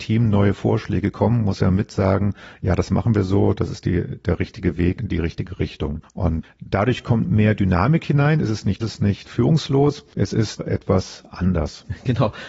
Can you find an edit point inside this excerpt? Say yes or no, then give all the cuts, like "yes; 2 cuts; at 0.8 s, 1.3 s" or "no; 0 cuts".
yes; 5 cuts; at 5.0 s, 8.8 s, 9.2 s, 10.1 s, 10.6 s